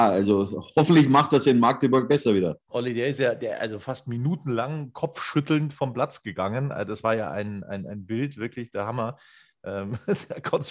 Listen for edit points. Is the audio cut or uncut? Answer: cut